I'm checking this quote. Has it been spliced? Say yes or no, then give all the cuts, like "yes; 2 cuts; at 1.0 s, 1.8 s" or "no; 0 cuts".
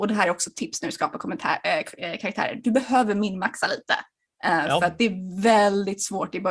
no; 0 cuts